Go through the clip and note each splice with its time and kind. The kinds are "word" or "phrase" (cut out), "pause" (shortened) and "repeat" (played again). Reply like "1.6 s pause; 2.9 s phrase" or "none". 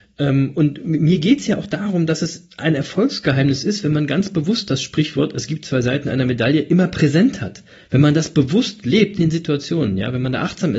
9.2 s word

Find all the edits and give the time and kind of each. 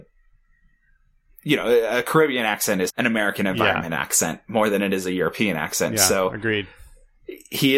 2.9 s word

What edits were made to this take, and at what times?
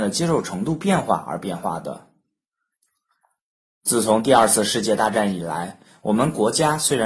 none

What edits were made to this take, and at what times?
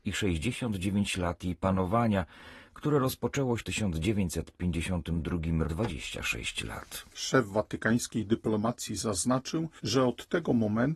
3.6 s word; 5.6 s phrase; 7.1 s pause

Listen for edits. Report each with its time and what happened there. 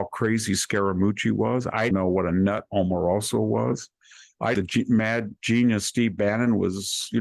1.9 s word; 4.5 s phrase; 5.4 s pause

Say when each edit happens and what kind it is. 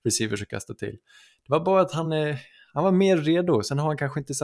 none

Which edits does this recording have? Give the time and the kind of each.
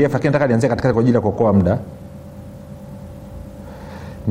none

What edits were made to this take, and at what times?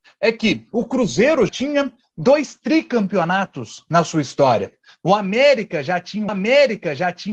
1.5 s word; 6.3 s repeat

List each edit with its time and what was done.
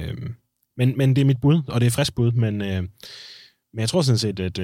none

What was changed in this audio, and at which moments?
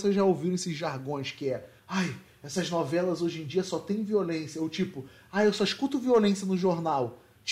1.8 s pause

